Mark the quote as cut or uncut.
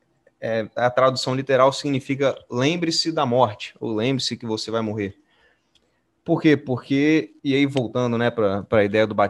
cut